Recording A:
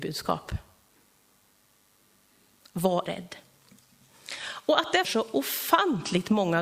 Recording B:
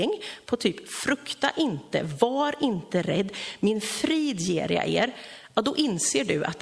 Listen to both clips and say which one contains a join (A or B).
A